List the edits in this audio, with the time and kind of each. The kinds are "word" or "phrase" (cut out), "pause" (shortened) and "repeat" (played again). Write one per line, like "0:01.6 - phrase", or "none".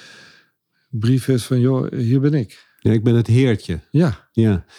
none